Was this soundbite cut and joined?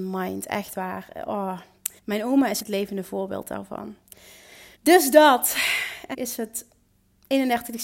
yes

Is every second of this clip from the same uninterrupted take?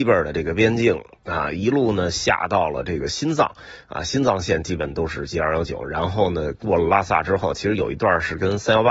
yes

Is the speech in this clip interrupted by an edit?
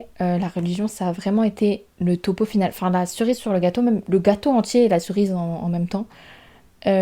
no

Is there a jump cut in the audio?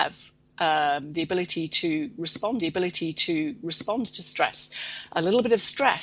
yes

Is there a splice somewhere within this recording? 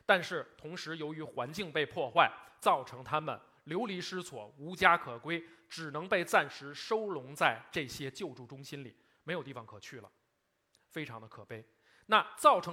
no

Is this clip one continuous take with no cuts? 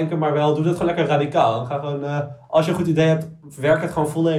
yes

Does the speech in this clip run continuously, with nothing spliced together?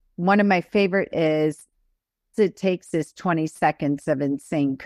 no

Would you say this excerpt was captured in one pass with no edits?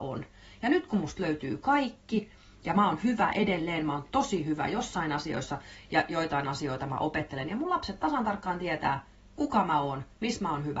yes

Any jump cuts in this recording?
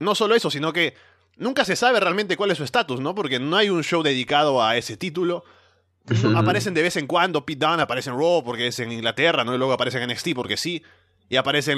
no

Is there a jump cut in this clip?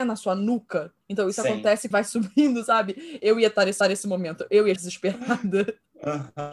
yes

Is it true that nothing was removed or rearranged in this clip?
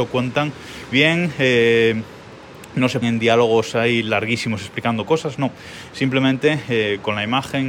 no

